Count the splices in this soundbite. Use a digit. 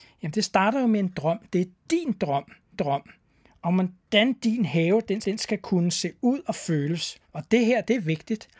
3